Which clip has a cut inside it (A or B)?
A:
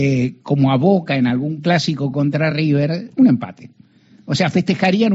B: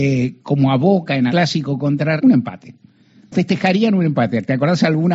B